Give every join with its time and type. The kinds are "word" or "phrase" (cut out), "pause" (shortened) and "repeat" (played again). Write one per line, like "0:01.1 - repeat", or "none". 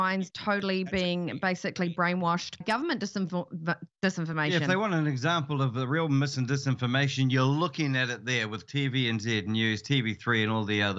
0:02.6 - word